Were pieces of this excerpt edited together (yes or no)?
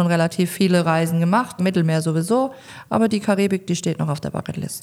yes